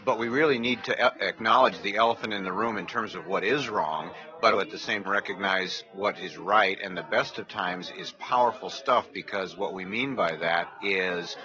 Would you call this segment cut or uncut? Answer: cut